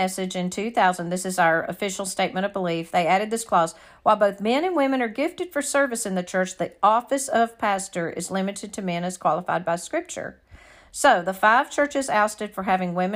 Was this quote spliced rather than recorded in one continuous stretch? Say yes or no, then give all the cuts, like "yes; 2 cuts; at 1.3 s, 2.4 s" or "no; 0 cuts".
no; 0 cuts